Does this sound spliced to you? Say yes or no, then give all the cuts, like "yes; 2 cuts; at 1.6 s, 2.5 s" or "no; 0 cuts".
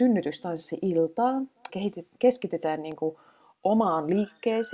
yes; 1 cut; at 1.7 s